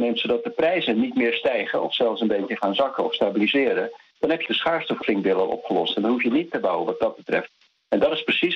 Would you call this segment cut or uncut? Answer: cut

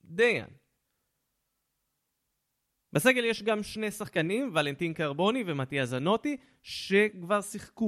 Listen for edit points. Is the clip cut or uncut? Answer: uncut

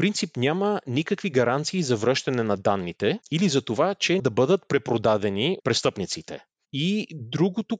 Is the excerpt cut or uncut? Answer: cut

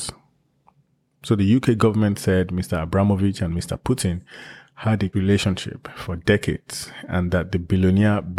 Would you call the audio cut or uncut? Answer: cut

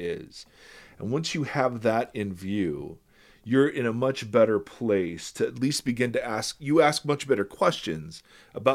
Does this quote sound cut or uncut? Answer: uncut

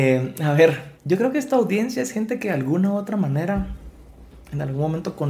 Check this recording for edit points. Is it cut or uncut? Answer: cut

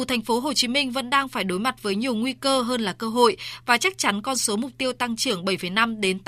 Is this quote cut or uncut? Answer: uncut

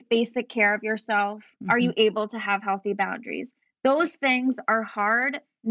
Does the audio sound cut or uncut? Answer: uncut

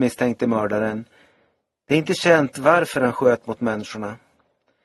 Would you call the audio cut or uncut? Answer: uncut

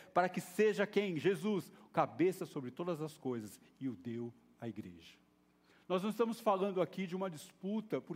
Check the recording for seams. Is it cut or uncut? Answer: uncut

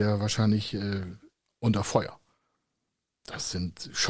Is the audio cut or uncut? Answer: uncut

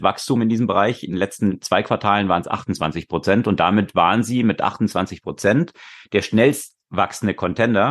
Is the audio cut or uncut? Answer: uncut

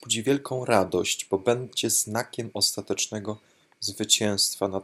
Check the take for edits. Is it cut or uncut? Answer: uncut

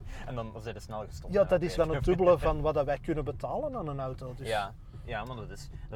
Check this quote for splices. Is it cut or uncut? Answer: cut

